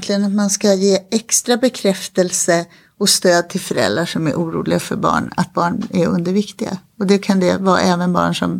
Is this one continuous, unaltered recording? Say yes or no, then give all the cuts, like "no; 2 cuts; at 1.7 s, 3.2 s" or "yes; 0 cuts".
yes; 0 cuts